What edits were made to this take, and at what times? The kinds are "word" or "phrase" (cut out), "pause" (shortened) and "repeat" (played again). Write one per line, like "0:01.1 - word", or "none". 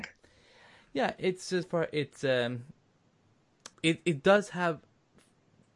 0:01.6 - word
0:03.7 - phrase